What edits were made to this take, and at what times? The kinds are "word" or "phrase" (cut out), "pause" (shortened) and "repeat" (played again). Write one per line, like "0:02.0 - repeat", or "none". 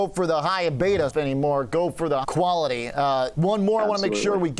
0:01.1 - word
0:02.2 - word
0:03.3 - word